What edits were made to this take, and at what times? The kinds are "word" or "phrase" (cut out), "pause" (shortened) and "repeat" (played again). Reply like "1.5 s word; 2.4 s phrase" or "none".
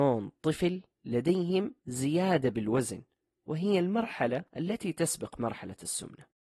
none